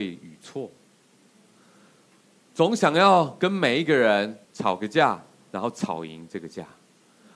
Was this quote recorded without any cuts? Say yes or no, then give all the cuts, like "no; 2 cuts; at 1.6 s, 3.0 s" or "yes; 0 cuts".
no; 1 cut; at 4.4 s